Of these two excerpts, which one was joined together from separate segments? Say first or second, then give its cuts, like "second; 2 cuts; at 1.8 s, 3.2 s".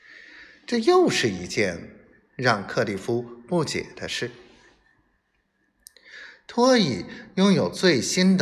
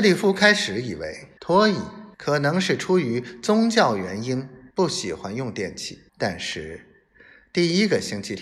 second; 4 cuts; at 1.4 s, 2.1 s, 4.7 s, 6.1 s